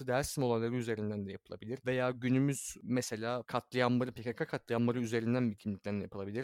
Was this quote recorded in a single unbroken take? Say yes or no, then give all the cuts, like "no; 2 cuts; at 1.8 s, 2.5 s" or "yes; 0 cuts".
yes; 0 cuts